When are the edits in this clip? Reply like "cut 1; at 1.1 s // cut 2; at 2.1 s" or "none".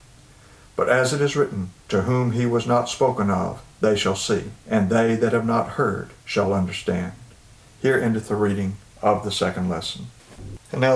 cut 1; at 1.8 s // cut 2; at 3.7 s // cut 3; at 4.6 s // cut 4; at 6.2 s // cut 5; at 7.6 s // cut 6; at 8.8 s